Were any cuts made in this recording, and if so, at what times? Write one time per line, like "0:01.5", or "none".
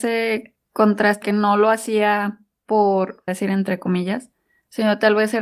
0:01.2
0:03.3

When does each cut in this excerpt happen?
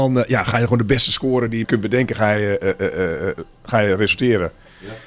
0:01.6

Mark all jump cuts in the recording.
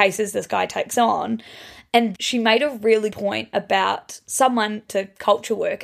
0:02.1
0:03.1
0:04.9

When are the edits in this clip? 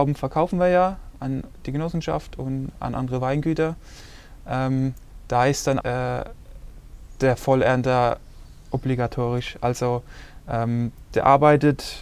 0:05.8

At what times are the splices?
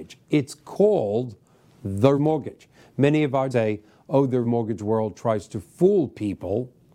0:02.2
0:03.5
0:04.4

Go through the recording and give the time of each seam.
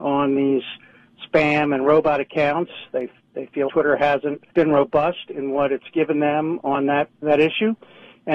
0:03.7
0:04.5
0:07.2

